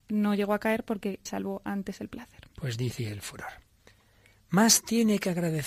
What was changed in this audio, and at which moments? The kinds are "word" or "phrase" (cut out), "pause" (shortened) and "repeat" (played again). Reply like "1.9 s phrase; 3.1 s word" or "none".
1.3 s word; 3.0 s word